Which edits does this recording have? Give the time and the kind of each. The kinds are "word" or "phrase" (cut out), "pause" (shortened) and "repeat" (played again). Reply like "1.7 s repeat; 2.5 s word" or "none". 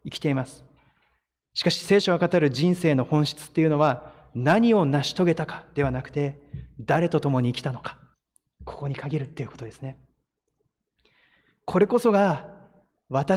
8.1 s pause